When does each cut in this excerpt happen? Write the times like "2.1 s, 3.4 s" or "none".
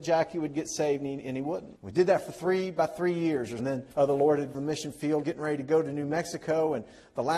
1.8 s, 3.6 s, 3.9 s, 4.5 s, 5.2 s